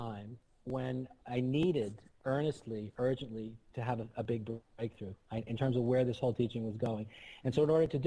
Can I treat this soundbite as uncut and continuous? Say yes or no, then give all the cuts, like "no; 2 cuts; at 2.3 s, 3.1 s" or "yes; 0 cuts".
no; 3 cuts; at 1.2 s, 3.7 s, 5.5 s